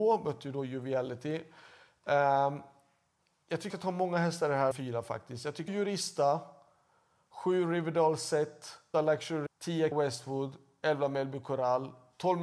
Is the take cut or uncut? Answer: cut